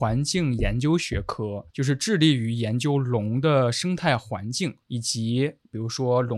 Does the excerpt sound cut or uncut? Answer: cut